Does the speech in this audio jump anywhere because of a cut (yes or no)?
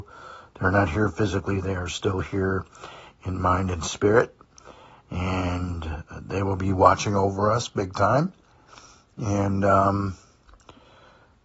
no